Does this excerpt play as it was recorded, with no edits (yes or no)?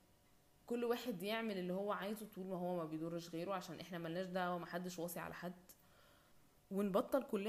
yes